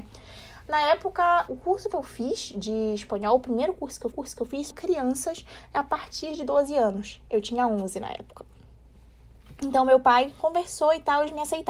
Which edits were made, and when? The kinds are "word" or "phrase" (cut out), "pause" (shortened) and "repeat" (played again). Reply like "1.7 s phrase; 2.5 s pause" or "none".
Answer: 1.5 s word; 4.1 s repeat; 4.7 s word